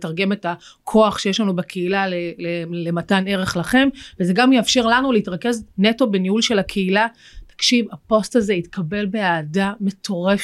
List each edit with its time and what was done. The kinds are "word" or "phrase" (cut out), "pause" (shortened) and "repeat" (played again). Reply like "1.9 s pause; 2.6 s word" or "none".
5.7 s pause